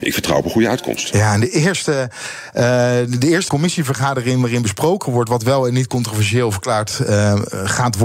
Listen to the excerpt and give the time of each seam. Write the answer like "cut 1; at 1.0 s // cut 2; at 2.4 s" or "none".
cut 1; at 3.5 s